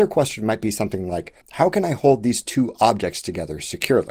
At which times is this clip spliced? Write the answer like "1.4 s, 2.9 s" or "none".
1.4 s